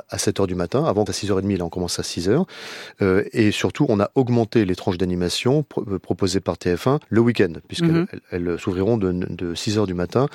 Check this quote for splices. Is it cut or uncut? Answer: cut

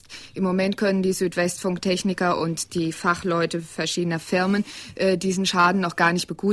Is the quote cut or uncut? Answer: uncut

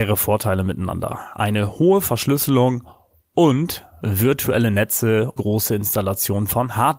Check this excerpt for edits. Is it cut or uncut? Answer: cut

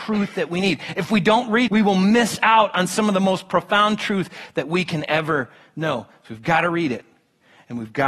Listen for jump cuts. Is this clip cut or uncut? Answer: cut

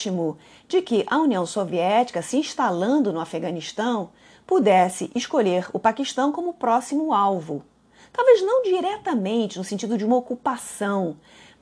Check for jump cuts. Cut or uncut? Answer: uncut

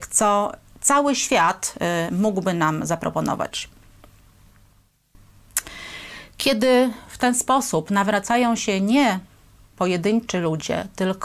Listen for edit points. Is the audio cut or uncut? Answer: uncut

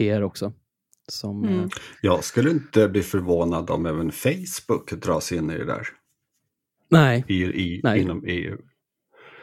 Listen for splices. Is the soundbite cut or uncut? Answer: uncut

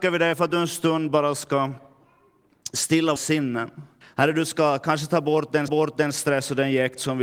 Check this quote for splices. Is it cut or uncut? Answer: cut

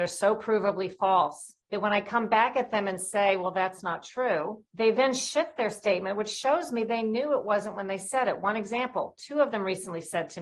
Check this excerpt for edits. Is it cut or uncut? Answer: cut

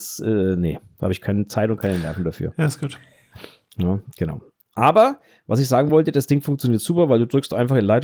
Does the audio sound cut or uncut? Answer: uncut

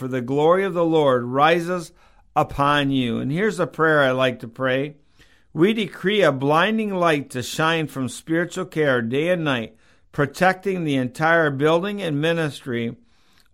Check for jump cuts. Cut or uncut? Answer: uncut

